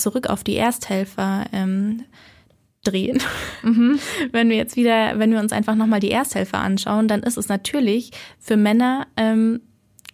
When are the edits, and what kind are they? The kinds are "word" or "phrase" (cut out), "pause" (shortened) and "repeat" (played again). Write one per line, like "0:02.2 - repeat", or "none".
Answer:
none